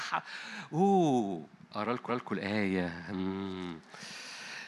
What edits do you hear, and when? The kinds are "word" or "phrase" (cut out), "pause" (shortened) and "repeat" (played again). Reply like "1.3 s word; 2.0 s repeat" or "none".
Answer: 2.1 s repeat